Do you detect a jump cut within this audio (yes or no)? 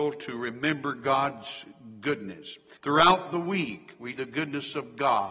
yes